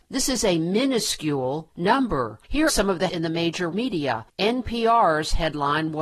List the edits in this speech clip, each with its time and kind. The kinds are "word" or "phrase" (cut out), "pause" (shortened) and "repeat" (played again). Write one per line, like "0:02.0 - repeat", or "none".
0:02.7 - word
0:03.1 - word
0:03.7 - word

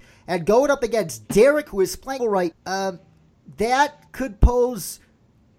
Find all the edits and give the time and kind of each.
0:01.7 - word
0:02.2 - phrase
0:02.5 - word
0:04.1 - pause

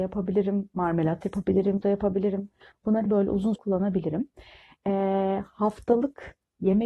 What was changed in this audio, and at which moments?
0:01.8 - word
0:03.1 - word
0:03.6 - word

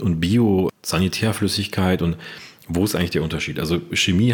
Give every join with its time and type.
none

